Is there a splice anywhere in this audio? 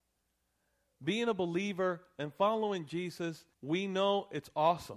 yes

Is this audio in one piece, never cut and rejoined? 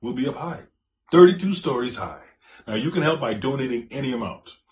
yes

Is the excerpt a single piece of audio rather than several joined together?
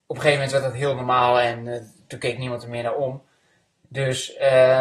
yes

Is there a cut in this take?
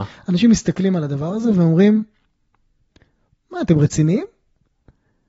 no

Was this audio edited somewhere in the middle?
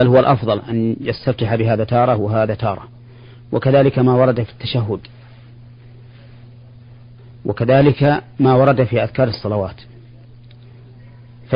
no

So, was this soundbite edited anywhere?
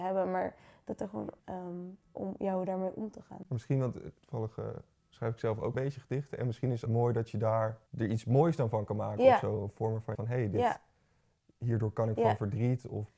yes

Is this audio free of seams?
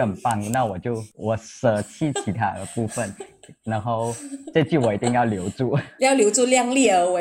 no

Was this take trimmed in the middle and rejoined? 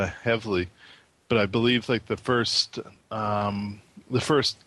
no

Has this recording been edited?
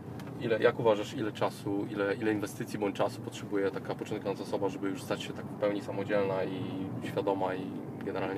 no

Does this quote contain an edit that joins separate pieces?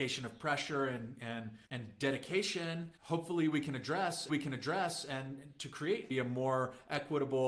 yes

